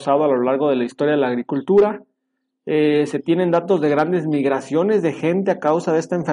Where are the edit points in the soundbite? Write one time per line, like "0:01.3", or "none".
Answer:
none